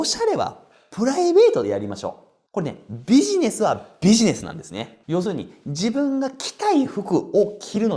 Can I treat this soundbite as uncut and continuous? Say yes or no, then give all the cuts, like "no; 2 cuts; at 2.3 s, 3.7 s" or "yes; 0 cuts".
yes; 0 cuts